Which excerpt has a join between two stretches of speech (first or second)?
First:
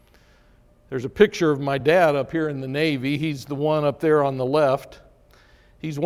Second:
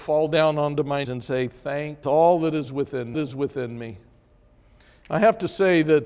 second